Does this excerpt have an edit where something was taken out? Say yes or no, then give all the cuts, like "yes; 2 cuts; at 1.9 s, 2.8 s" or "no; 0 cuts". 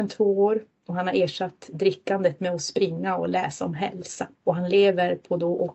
yes; 1 cut; at 4.3 s